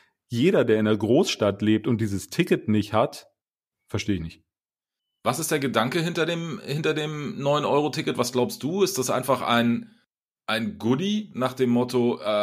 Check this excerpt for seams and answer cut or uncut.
uncut